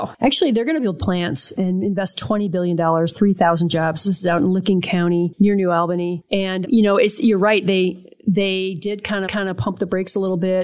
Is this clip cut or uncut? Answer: cut